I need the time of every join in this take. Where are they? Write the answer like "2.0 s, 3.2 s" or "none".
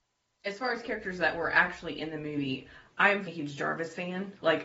3.3 s